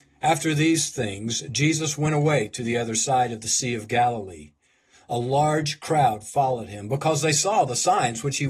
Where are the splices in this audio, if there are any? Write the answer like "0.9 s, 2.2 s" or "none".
none